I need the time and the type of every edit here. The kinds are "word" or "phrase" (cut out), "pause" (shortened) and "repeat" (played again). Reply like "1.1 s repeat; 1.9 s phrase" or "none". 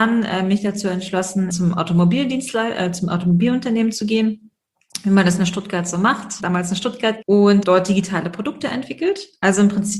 1.5 s word; 6.4 s word; 7.2 s word; 7.6 s word